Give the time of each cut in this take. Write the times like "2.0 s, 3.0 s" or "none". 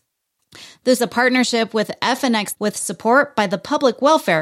1.0 s, 2.5 s

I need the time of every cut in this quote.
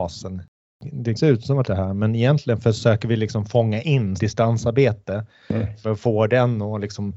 1.2 s, 1.6 s, 4.2 s

